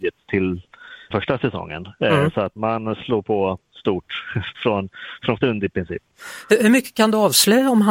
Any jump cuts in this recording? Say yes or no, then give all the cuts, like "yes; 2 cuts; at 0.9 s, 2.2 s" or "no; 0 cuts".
yes; 4 cuts; at 1.1 s, 2.6 s, 4.5 s, 5.4 s